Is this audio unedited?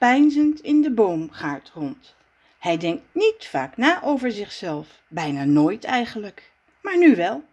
yes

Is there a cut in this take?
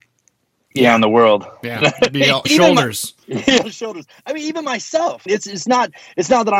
yes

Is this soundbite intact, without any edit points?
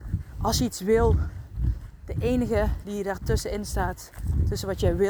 yes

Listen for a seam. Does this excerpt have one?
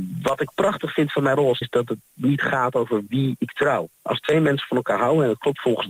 yes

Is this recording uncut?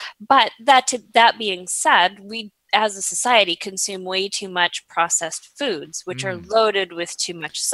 yes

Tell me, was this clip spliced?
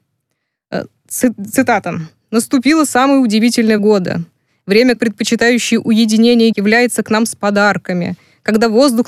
yes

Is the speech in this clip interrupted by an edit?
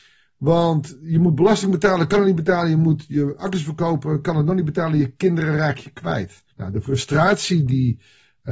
yes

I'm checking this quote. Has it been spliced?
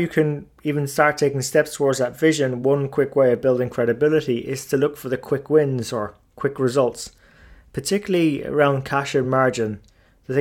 no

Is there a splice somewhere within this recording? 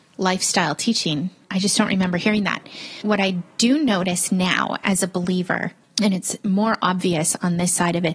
no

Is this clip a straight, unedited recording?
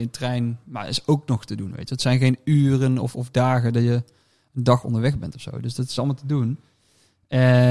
yes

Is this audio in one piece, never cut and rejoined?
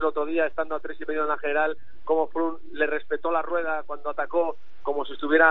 yes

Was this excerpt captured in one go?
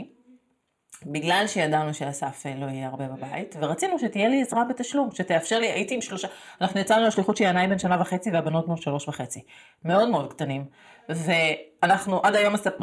yes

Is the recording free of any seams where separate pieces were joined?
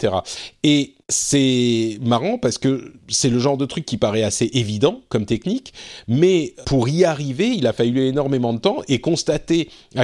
no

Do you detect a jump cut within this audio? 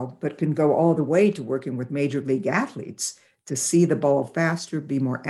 no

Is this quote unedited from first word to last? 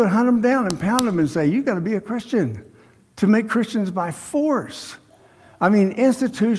yes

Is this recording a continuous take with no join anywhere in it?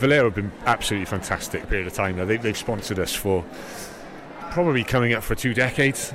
no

